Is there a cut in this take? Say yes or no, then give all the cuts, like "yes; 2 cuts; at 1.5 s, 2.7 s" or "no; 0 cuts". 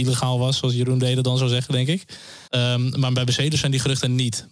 yes; 1 cut; at 2.5 s